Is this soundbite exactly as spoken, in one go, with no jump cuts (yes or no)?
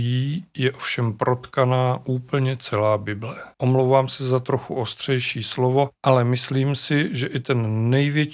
no